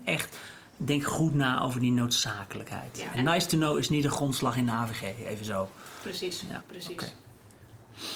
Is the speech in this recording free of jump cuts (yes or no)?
no